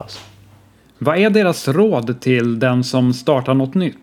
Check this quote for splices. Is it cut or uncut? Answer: uncut